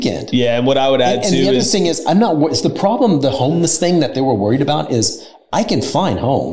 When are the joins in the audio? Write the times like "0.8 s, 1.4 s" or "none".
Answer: none